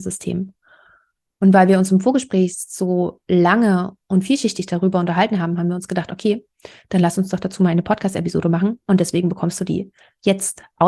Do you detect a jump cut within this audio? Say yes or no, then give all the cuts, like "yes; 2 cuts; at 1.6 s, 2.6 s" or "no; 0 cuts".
yes; 1 cut; at 4.0 s